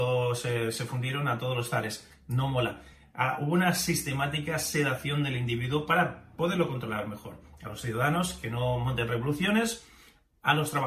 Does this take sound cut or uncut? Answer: uncut